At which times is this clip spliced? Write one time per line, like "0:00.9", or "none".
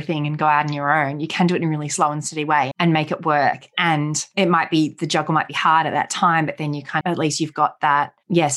0:02.7
0:07.0